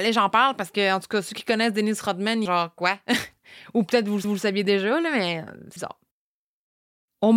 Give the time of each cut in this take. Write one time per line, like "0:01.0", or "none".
0:02.5
0:04.2
0:05.8